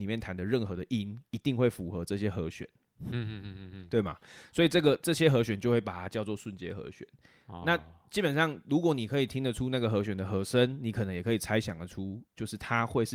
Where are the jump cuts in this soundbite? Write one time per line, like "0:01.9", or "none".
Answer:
0:07.6

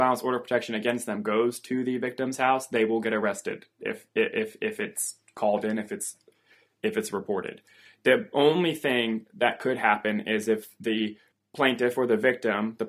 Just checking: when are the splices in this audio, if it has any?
0:11.3

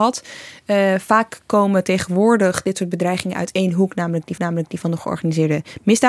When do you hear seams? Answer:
0:04.4

